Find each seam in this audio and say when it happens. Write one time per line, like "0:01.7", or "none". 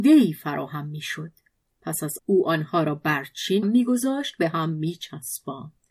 0:01.6
0:02.2
0:03.6